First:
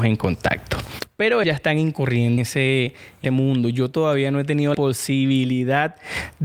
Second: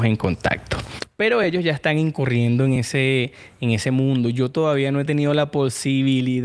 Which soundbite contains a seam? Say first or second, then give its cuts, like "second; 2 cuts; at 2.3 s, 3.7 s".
first; 4 cuts; at 1.4 s, 2.4 s, 3.2 s, 4.7 s